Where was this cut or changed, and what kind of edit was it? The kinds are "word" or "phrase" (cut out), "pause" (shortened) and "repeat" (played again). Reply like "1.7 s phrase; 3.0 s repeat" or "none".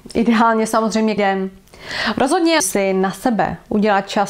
1.2 s word; 2.6 s word